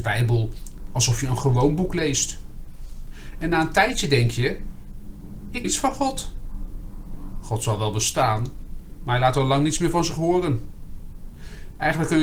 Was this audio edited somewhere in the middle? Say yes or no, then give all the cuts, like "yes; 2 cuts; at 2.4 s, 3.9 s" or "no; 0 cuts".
yes; 1 cut; at 5.6 s